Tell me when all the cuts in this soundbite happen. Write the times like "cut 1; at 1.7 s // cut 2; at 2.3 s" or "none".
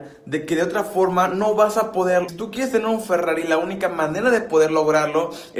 cut 1; at 2.3 s